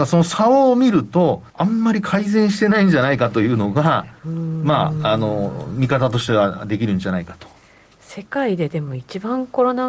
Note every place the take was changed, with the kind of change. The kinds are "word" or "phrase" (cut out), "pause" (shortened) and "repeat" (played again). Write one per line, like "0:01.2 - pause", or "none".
0:01.5 - pause
0:04.2 - pause